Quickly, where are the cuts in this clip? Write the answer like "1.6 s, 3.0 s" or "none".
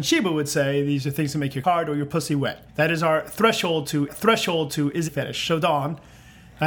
1.6 s, 2.7 s, 4.1 s, 5.1 s